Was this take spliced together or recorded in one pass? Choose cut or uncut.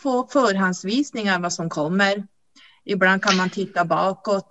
uncut